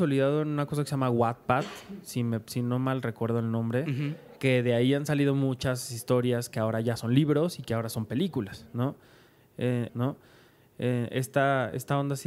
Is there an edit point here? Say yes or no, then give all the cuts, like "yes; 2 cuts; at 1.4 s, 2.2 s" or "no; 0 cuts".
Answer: yes; 2 cuts; at 4.4 s, 9.9 s